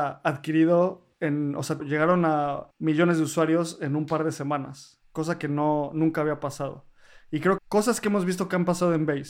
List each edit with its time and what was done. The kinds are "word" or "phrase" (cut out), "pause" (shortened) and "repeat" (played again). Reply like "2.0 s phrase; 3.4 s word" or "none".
1.1 s pause; 1.8 s word; 2.7 s pause; 7.6 s phrase